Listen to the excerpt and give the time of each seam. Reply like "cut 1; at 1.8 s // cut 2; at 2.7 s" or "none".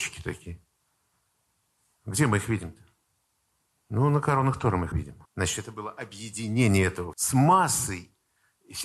cut 1; at 4.9 s // cut 2; at 5.2 s // cut 3; at 7.1 s